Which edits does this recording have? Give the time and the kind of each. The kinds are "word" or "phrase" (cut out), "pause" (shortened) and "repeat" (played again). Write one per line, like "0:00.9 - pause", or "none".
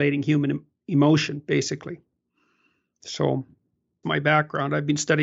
0:04.0 - word